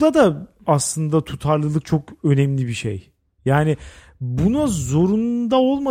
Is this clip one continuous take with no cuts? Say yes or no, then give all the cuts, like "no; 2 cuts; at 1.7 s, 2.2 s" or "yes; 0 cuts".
yes; 0 cuts